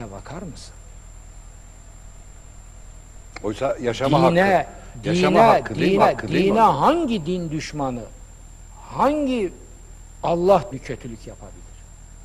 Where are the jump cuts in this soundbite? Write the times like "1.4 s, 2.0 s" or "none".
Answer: 6.0 s, 10.7 s